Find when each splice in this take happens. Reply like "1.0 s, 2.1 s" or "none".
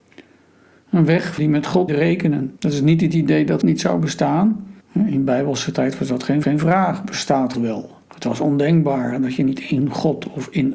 1.4 s, 1.9 s, 2.6 s, 3.6 s, 4.8 s, 6.4 s, 7.5 s, 8.0 s